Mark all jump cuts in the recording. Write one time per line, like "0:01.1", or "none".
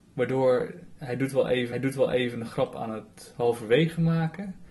0:01.7